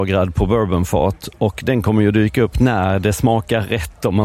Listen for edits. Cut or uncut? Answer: uncut